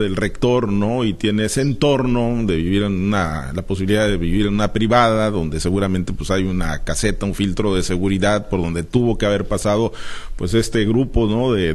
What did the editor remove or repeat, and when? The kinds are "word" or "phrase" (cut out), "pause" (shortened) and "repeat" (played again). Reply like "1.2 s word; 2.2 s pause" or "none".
none